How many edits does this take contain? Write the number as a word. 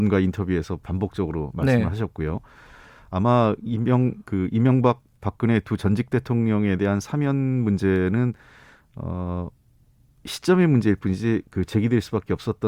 zero